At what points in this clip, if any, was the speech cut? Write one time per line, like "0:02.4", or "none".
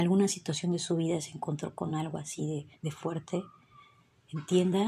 none